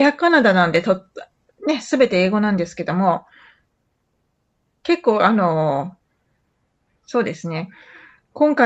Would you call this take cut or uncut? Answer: uncut